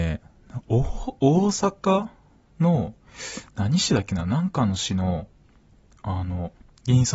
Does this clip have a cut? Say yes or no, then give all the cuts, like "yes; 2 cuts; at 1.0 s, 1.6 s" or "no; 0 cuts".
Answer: no; 0 cuts